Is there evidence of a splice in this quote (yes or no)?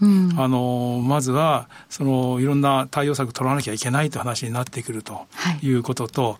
no